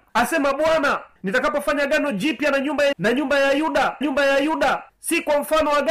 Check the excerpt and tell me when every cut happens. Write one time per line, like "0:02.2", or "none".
0:02.9
0:04.0